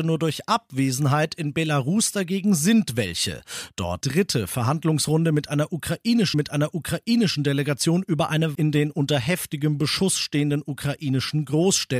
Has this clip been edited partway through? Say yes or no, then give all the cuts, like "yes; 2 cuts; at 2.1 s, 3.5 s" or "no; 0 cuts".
yes; 3 cuts; at 4.0 s, 6.3 s, 8.5 s